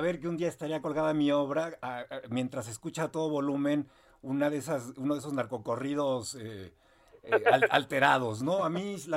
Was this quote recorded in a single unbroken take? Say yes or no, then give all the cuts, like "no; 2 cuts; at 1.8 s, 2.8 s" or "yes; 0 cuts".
yes; 0 cuts